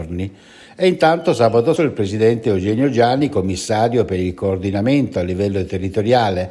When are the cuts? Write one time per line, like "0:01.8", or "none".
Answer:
0:01.8